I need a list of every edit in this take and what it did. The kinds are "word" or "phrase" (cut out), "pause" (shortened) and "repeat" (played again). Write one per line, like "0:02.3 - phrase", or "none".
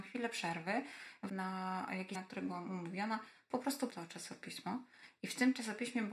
0:01.3 - word
0:02.1 - word
0:03.9 - word